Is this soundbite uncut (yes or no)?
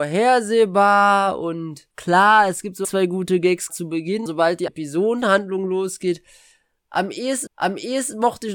no